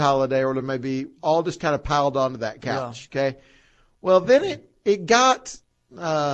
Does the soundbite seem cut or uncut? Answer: uncut